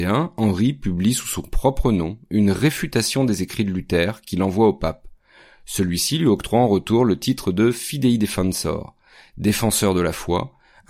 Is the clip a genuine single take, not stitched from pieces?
yes; 0 cuts

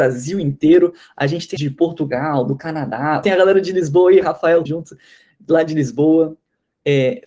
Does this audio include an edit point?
yes; 3 cuts; at 1.6 s, 3.2 s, 4.7 s

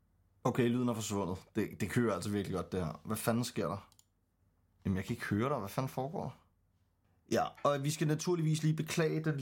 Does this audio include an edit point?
no; 0 cuts

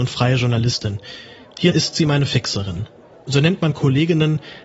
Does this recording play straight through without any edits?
no; 1 cut; at 1.7 s

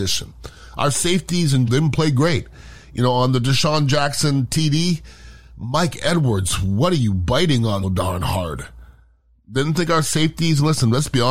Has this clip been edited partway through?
yes; 2 cuts; at 1.7 s, 7.8 s

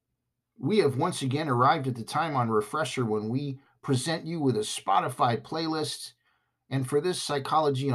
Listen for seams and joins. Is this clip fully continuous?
yes; 0 cuts

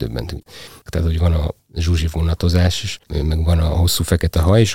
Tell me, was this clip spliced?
yes; 1 cut; at 3.0 s

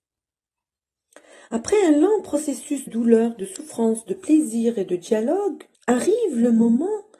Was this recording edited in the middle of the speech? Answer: yes; 2 cuts; at 2.9 s, 5.7 s

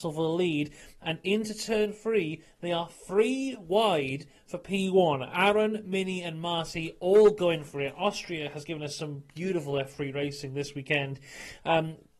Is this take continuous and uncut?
yes; 0 cuts

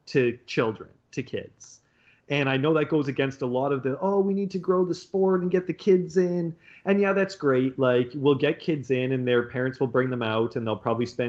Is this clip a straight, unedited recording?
yes; 0 cuts

